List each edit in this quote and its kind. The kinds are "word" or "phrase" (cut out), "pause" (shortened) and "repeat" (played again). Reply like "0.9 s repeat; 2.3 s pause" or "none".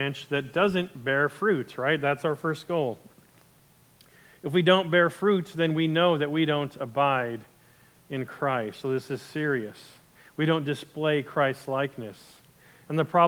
none

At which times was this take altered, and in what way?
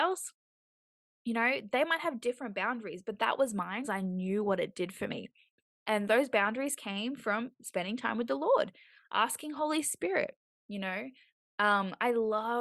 3.8 s word

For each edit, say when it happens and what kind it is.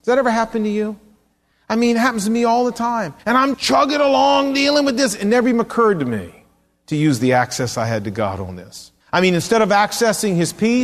3.2 s pause; 3.5 s word; 9.0 s pause

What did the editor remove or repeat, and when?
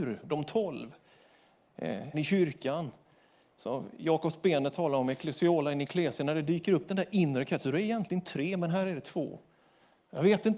2.1 s word

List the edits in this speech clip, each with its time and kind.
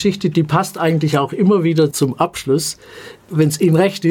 1.9 s word

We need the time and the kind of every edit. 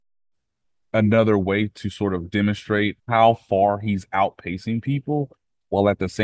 3.0 s pause

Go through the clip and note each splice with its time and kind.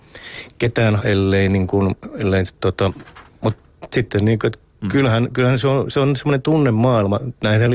1.0 s word; 4.7 s pause

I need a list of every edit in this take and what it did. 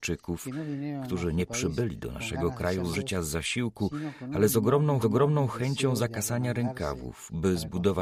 2.9 s word; 5.0 s repeat

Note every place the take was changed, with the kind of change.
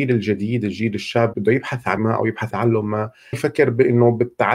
1.3 s word; 2.0 s word; 2.5 s word; 3.3 s word

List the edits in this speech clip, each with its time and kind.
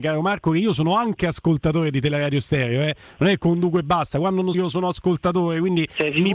4.5 s phrase

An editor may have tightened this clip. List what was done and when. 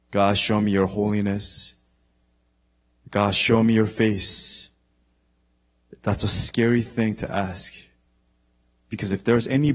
none

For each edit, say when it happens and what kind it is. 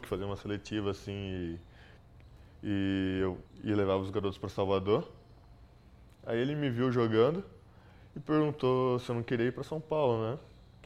3.5 s pause

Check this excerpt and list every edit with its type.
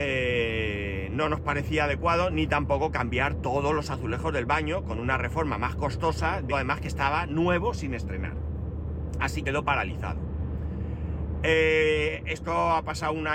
6.5 s word; 9.4 s word

